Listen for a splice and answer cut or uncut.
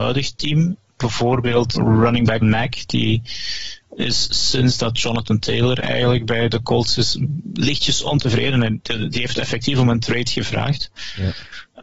cut